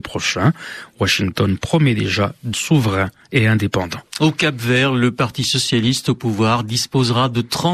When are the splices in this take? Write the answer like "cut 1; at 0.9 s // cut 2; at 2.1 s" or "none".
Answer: cut 1; at 2.5 s